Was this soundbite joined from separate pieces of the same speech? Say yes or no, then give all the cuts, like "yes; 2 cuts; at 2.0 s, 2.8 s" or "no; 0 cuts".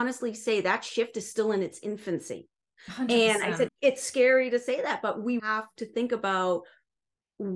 yes; 2 cuts; at 3.7 s, 5.4 s